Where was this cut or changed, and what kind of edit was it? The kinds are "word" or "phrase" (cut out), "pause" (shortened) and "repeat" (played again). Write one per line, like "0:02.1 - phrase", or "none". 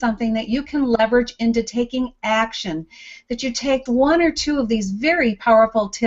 0:03.9 - word